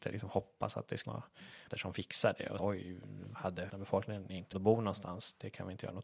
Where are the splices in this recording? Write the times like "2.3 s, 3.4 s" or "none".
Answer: 1.0 s, 1.7 s, 2.6 s, 3.7 s, 4.5 s